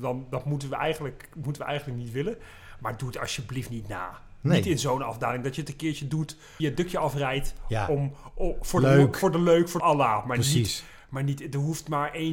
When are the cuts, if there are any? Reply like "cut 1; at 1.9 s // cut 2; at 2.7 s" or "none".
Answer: cut 1; at 6.6 s // cut 2; at 9.8 s